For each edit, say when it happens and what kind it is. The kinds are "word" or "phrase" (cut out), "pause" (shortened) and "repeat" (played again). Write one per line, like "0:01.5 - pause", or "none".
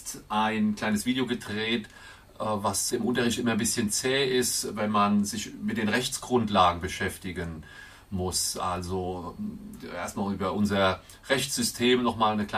0:02.9 - word